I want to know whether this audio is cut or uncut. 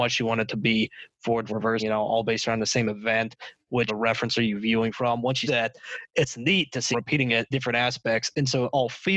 cut